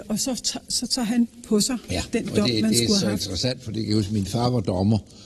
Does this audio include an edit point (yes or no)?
no